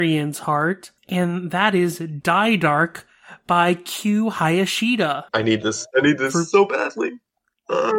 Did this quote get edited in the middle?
yes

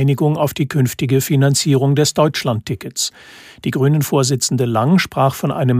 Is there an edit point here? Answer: no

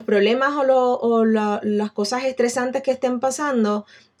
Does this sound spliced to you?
no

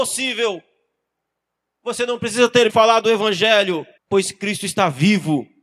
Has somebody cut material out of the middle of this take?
yes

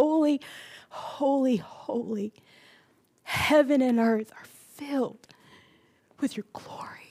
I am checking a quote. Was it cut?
no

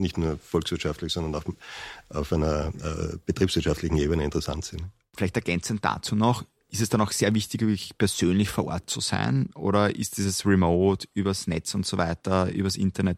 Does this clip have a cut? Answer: no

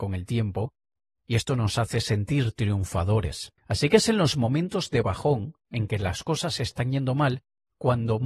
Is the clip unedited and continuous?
no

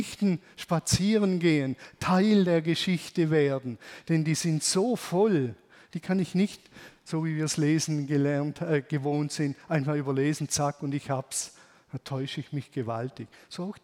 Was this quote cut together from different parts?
no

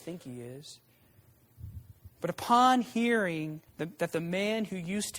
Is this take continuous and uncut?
no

